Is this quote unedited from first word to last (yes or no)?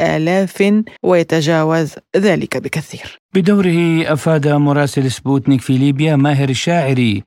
no